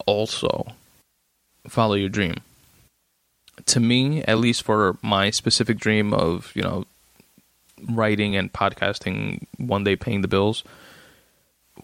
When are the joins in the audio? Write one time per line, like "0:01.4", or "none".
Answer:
none